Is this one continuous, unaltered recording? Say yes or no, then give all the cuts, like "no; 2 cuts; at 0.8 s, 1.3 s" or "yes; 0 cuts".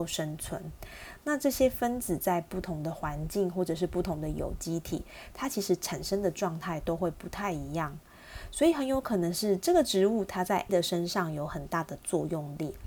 no; 1 cut; at 10.7 s